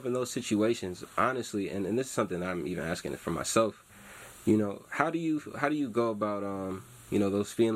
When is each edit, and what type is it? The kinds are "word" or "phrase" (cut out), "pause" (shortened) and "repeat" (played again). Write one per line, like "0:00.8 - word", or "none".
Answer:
none